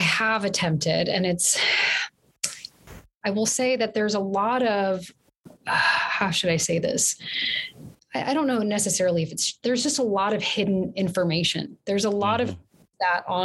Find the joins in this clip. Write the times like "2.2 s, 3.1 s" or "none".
none